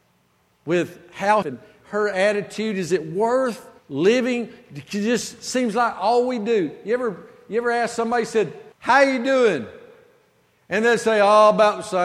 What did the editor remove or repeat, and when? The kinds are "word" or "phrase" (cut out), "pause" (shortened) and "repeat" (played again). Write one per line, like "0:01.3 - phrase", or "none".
0:01.4 - phrase
0:03.8 - pause
0:08.7 - pause